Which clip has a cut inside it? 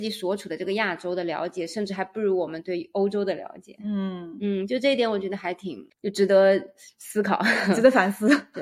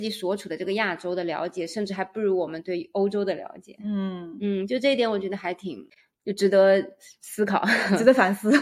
first; 1 cut; at 5.9 s

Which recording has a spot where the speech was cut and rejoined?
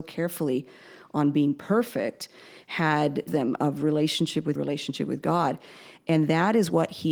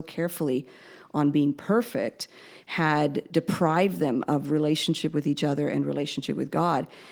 first; 2 cuts; at 3.3 s, 4.6 s

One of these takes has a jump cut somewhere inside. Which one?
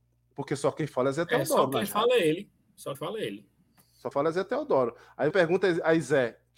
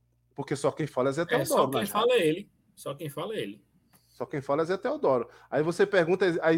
first; 3 cuts; at 2.9 s, 4.1 s, 5.3 s

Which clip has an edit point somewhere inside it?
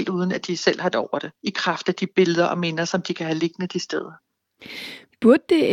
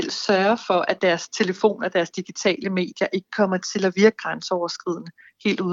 first; 2 cuts; at 0.9 s, 1.4 s

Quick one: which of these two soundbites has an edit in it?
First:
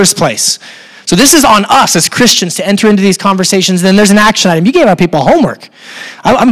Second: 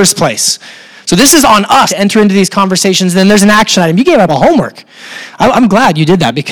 second; 2 cuts; at 1.9 s, 4.3 s

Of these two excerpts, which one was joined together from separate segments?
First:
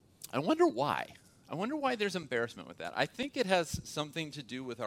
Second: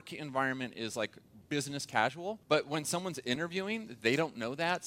second; 1 cut; at 2.4 s

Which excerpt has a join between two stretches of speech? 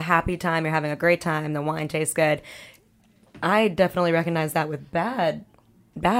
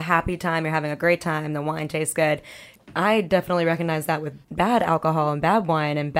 second; 2 cuts; at 2.8 s, 4.4 s

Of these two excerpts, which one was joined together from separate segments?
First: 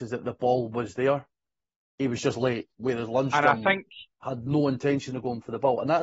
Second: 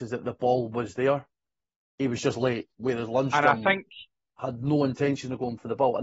first; 1 cut; at 4.1 s

